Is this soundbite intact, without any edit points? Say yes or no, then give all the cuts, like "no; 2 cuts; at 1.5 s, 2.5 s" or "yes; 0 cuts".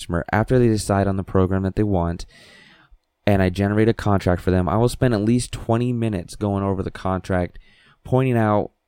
yes; 0 cuts